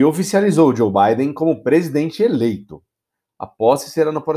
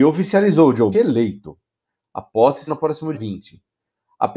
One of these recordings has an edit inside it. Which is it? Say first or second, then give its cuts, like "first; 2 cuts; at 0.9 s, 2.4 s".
second; 3 cuts; at 0.9 s, 2.7 s, 3.1 s